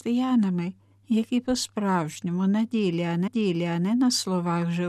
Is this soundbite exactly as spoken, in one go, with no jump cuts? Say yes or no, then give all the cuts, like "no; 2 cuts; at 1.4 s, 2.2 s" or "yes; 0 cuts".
no; 1 cut; at 3.3 s